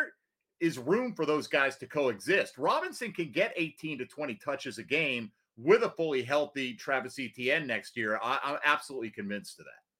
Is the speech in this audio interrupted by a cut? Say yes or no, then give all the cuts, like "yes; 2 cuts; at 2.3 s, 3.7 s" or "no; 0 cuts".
no; 0 cuts